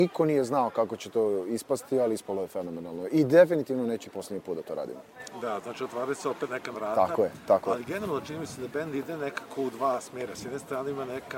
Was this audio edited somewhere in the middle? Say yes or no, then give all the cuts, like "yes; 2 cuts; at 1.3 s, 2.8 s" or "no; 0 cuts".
yes; 2 cuts; at 4.0 s, 6.7 s